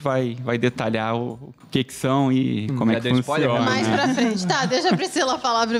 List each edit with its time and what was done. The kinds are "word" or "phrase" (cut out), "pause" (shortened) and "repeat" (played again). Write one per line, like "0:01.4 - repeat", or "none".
0:01.6 - pause